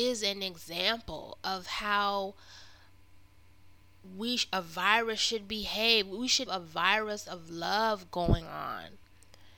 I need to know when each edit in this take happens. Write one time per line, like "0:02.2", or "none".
0:06.5